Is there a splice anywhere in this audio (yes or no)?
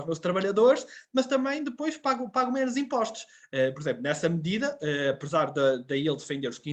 no